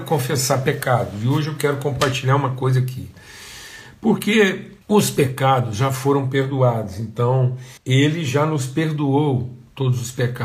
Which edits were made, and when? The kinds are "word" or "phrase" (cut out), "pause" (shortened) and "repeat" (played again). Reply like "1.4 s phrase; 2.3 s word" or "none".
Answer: 4.8 s pause; 7.8 s pause